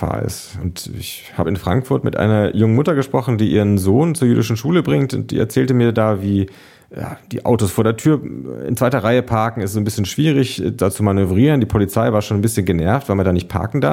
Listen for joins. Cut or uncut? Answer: uncut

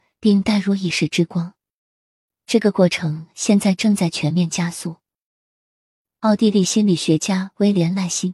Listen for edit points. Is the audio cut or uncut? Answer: uncut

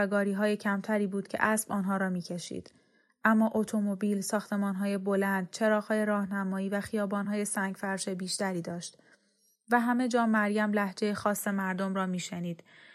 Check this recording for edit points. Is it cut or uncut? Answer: uncut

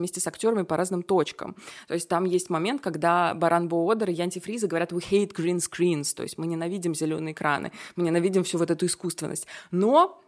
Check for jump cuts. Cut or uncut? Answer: uncut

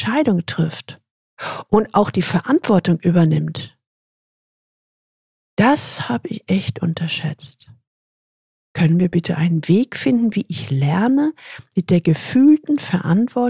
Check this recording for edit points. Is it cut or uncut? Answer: uncut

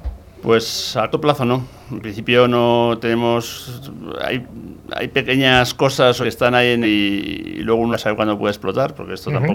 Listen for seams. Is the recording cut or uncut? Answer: cut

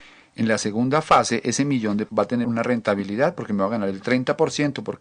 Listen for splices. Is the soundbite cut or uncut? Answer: cut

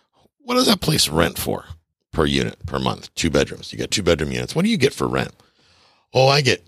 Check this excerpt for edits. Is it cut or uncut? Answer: cut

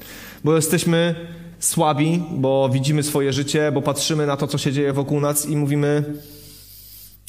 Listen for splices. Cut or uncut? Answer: uncut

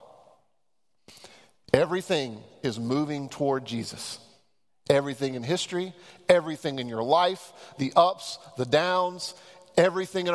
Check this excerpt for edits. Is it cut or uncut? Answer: uncut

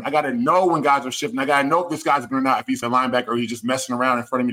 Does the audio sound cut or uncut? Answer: cut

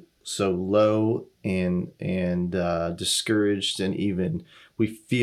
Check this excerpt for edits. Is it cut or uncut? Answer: uncut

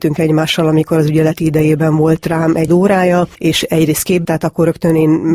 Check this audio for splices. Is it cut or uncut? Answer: cut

